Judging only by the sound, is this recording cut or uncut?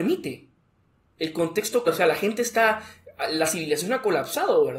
cut